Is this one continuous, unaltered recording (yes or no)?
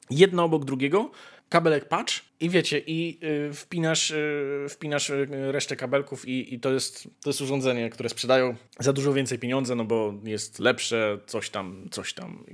no